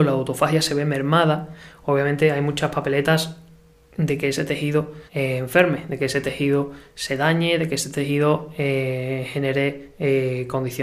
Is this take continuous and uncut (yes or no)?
no